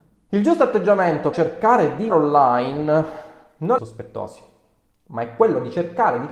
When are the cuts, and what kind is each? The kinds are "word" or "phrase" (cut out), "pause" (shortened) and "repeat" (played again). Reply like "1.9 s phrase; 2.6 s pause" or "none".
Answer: 1.3 s word; 2.1 s word; 3.8 s phrase